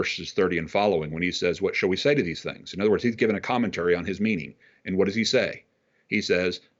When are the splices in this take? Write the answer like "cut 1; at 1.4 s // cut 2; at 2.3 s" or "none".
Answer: none